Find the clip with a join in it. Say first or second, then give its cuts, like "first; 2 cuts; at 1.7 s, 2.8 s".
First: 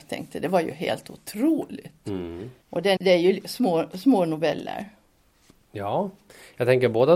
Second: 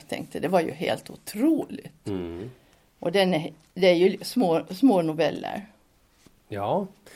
first; 2 cuts; at 2.6 s, 3.0 s